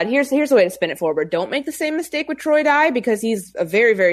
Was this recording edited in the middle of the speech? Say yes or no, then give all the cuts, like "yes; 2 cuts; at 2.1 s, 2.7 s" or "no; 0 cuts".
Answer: no; 0 cuts